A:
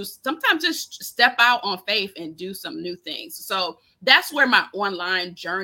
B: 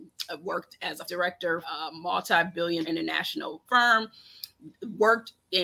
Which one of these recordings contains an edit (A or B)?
B